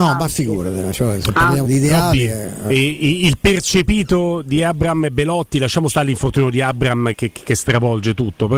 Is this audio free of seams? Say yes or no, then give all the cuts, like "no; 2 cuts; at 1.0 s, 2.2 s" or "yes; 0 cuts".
no; 2 cuts; at 1.7 s, 7.1 s